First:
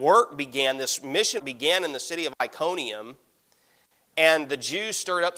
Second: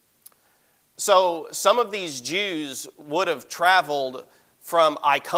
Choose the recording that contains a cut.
first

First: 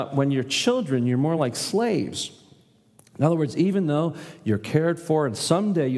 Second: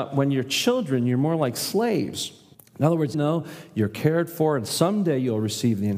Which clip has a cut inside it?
second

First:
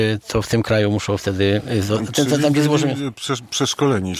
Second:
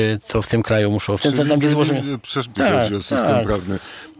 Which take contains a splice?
second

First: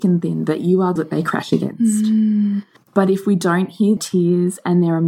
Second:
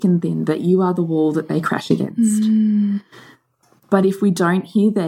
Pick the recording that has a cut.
first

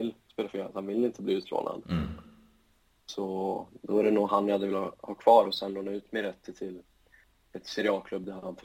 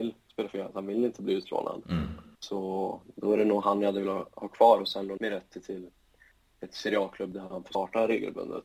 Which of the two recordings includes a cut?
second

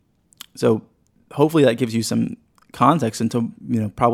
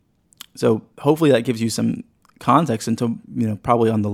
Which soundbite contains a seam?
second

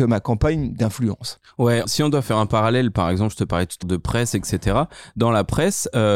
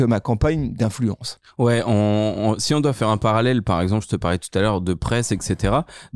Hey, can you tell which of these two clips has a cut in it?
first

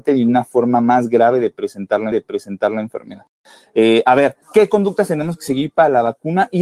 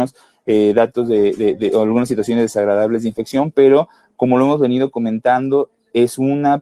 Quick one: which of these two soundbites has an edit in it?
first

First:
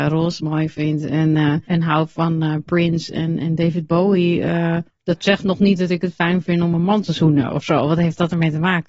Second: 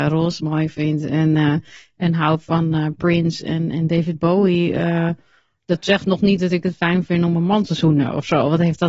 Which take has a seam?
first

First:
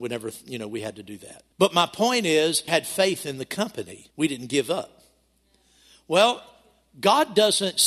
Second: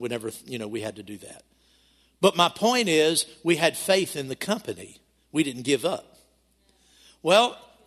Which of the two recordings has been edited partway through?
first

